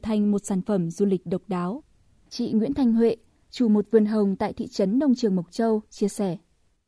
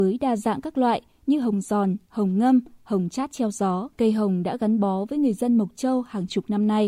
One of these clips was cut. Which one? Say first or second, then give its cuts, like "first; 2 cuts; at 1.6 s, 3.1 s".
second; 1 cut; at 3.9 s